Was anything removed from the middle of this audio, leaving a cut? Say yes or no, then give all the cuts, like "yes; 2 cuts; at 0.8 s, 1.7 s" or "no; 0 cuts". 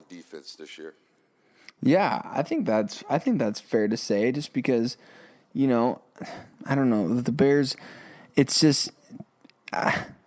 no; 0 cuts